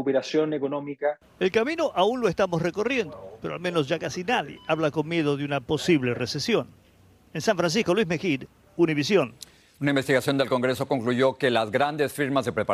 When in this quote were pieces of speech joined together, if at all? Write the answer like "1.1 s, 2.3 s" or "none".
none